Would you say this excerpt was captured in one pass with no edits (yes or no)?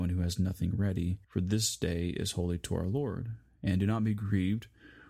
no